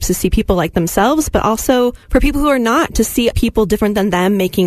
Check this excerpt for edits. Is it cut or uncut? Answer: cut